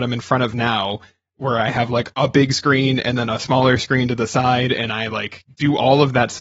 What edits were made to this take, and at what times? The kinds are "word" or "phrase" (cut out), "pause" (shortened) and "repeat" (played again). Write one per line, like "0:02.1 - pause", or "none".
none